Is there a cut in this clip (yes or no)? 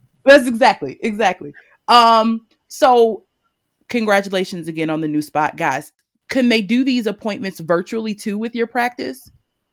no